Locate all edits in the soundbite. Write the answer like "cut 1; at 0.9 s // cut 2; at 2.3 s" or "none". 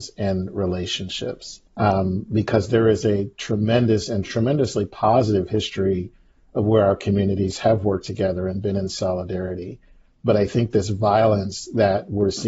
cut 1; at 1.7 s